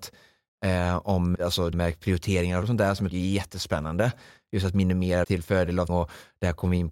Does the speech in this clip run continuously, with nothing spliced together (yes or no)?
no